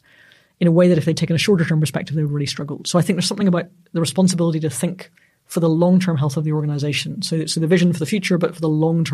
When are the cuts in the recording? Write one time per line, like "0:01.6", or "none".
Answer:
none

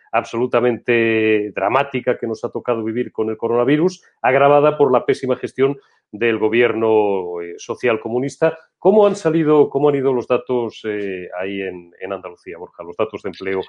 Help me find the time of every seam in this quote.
none

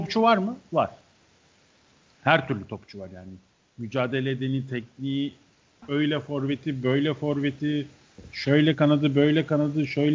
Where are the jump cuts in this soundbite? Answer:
none

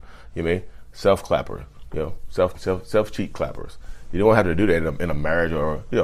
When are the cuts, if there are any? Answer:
0:02.5

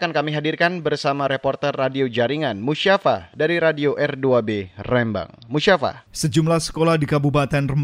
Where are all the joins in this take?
0:06.1

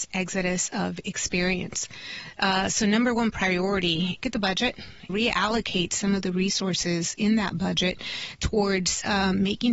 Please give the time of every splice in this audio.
0:04.2
0:05.1

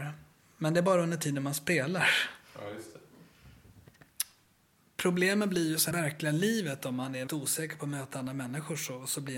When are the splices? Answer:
0:05.9
0:07.3

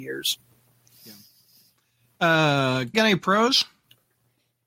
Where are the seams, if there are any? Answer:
0:02.9

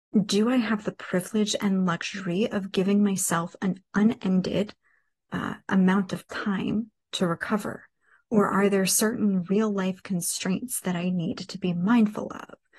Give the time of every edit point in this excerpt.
none

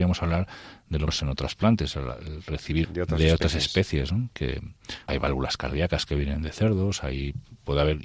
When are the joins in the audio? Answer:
0:01.1
0:02.8
0:05.1

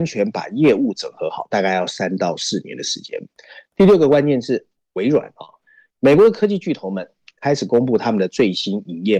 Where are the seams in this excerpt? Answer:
0:04.7

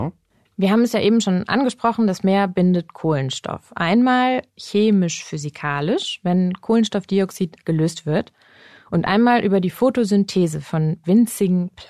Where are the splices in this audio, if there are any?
none

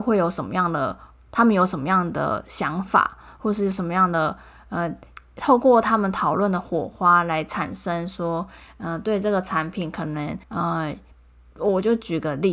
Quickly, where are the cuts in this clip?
0:10.4

